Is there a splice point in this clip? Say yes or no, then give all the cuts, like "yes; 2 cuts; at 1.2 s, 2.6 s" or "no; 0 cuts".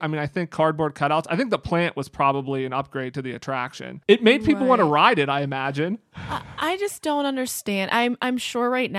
yes; 1 cut; at 4.0 s